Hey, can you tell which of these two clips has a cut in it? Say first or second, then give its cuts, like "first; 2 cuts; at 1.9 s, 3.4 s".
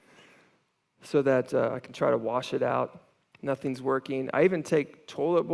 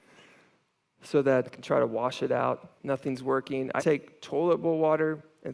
second; 3 cuts; at 1.5 s, 2.8 s, 3.8 s